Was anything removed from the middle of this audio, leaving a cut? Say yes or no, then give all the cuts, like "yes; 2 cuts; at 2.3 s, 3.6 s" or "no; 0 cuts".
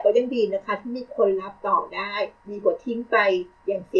yes; 1 cut; at 2.4 s